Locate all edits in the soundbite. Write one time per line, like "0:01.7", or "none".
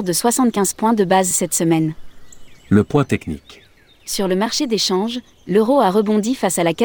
0:02.6
0:03.8

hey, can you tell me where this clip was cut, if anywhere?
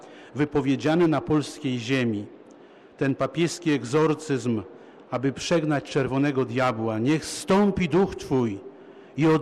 none

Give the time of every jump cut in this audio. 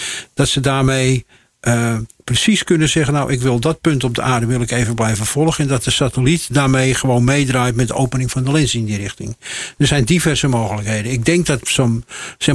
none

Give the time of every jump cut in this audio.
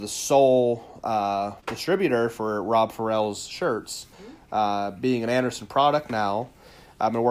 0:01.6
0:04.1

